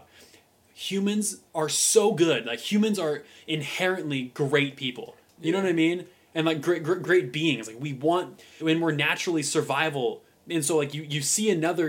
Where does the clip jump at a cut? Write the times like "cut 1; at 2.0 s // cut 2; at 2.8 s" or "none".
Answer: cut 1; at 1.5 s // cut 2; at 7.0 s // cut 3; at 8.6 s